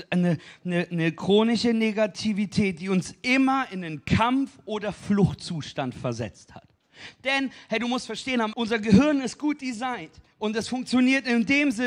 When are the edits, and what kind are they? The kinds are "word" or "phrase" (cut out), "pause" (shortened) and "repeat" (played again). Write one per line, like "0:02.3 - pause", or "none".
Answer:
0:08.5 - word
0:10.2 - pause